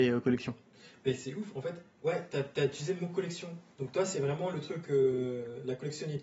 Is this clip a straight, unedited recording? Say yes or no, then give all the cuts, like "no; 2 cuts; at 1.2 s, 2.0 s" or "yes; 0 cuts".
yes; 0 cuts